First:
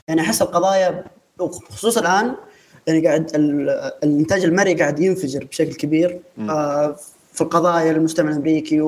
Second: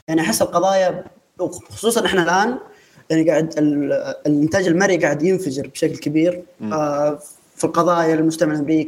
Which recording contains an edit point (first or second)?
first